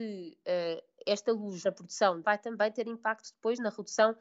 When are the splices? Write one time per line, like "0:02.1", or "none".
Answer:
0:01.6
0:02.2

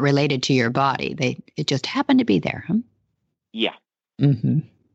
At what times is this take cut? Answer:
none

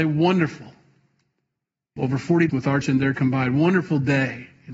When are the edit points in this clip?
0:02.0
0:02.5
0:02.8
0:03.1

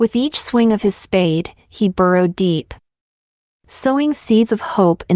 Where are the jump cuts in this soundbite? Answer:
none

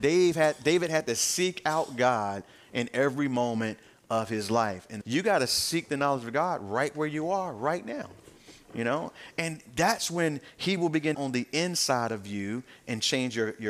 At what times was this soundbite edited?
0:05.0
0:11.1

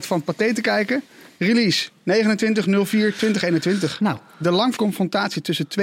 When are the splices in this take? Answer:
0:04.8

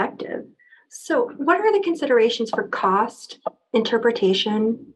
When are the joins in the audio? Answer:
none

